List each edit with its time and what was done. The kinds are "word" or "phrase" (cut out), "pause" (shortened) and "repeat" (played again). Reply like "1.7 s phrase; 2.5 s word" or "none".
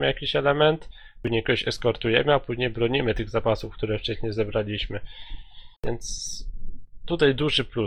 5.8 s pause